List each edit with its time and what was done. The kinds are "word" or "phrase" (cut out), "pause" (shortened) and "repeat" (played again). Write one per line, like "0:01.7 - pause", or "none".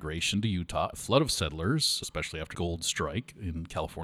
0:00.9 - word
0:02.0 - word
0:02.5 - word